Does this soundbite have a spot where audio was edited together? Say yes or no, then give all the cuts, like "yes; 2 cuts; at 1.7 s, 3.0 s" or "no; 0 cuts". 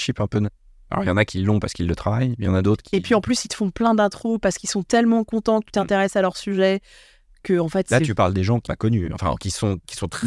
yes; 1 cut; at 8.7 s